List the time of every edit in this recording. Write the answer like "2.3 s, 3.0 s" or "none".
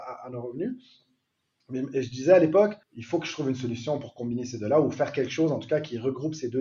2.8 s